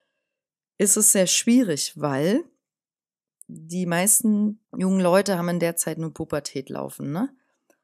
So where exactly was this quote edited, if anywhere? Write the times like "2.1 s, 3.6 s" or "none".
4.7 s